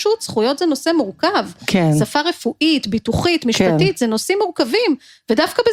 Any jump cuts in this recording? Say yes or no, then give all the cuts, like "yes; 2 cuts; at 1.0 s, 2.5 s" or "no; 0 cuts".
no; 0 cuts